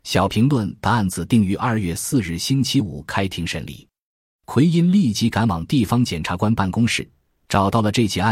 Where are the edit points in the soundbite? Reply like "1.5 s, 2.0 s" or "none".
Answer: none

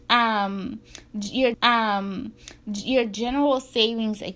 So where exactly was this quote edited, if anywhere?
1.5 s

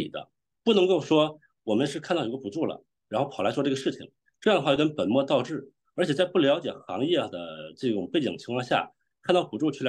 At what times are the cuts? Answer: none

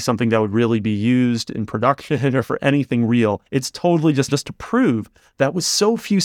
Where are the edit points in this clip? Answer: 3.5 s, 4.3 s

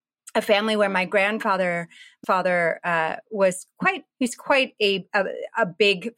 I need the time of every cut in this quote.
2.2 s, 4.1 s

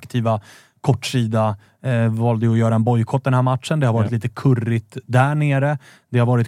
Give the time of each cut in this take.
none

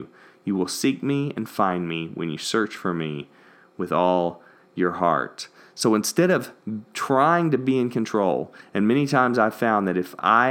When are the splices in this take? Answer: none

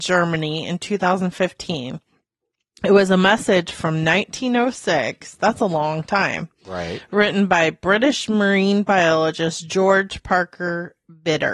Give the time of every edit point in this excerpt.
none

